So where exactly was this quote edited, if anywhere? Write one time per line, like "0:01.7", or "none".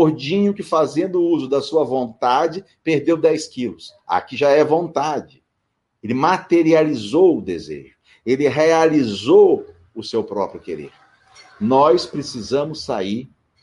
none